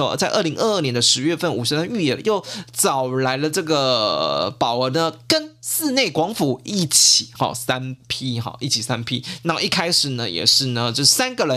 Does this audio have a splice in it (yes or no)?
no